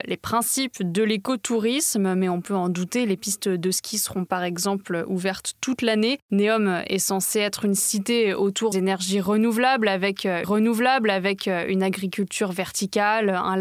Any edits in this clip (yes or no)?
yes